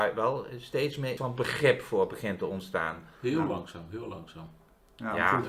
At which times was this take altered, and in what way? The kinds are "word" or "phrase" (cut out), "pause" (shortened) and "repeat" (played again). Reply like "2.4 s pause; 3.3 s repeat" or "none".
1.2 s word